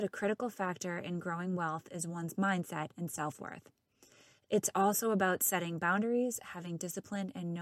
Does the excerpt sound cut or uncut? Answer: uncut